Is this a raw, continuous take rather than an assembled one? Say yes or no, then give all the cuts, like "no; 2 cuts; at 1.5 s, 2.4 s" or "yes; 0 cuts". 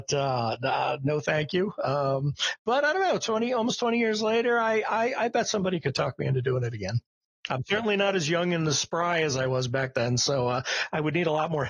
yes; 0 cuts